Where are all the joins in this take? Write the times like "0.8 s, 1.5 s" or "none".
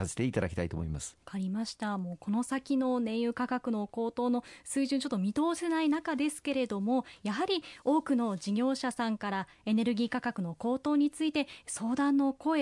1.2 s